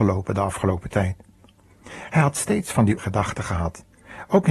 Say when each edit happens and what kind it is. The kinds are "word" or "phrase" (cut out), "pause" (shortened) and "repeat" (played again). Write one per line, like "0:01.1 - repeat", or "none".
0:03.0 - word